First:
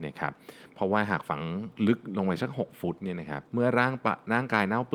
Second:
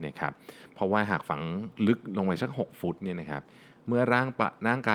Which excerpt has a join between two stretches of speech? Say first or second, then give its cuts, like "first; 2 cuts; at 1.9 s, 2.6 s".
first; 1 cut; at 3.5 s